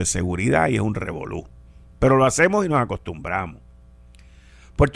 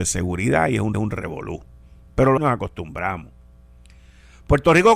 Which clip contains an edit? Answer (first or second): second